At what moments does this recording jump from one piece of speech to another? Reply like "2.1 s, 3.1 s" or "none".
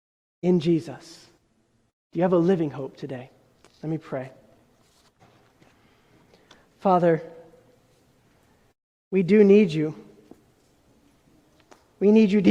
none